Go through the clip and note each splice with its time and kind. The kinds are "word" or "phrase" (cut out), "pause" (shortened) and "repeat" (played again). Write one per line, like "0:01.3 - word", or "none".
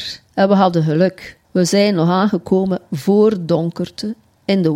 0:01.4 - pause